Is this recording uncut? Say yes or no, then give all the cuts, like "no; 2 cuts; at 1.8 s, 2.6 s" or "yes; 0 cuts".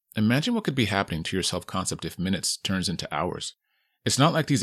yes; 0 cuts